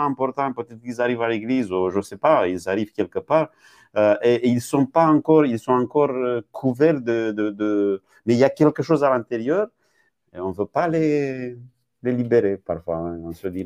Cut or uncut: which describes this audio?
uncut